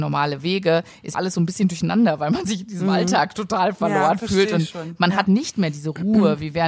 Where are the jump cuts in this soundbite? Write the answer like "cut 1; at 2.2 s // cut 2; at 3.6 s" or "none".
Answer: cut 1; at 1.1 s // cut 2; at 5.3 s